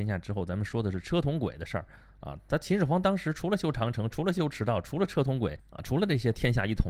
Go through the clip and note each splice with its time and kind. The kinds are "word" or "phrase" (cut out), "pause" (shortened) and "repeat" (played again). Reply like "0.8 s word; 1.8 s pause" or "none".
none